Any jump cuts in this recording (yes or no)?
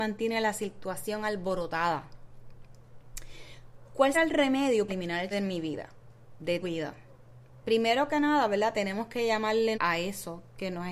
yes